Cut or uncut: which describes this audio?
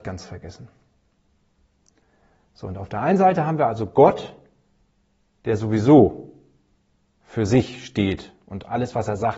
uncut